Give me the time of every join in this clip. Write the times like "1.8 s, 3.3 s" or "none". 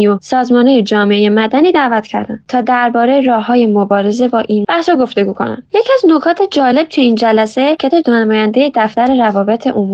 4.6 s, 7.9 s